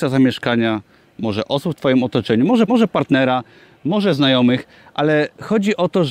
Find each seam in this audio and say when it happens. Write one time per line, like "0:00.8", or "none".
0:02.7